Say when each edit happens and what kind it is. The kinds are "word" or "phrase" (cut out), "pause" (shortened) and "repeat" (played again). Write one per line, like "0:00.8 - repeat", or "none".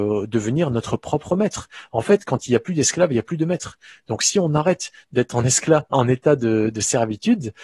none